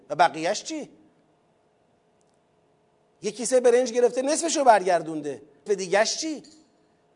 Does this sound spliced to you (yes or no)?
yes